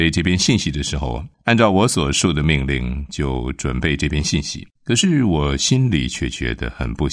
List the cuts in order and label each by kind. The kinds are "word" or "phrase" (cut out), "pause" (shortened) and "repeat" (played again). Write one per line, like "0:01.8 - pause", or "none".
0:01.3 - pause
0:04.7 - pause